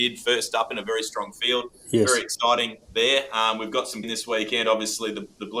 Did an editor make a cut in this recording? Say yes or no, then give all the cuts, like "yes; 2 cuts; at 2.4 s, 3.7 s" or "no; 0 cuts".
yes; 2 cuts; at 2.8 s, 4.0 s